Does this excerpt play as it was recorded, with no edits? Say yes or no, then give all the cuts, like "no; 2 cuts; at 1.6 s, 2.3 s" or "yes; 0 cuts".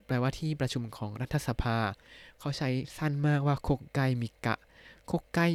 yes; 0 cuts